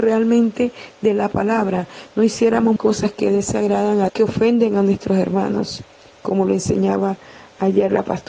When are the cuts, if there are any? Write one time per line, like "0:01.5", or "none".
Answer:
0:02.8
0:04.1
0:05.9